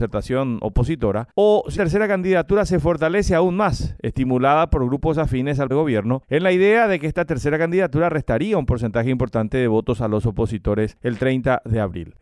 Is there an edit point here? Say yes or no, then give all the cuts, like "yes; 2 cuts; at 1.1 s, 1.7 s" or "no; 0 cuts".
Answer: yes; 2 cuts; at 1.8 s, 5.7 s